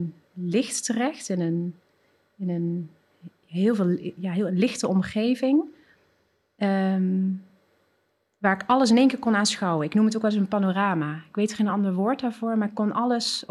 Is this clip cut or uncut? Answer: uncut